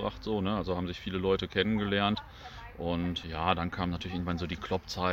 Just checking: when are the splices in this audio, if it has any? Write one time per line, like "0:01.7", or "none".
0:03.2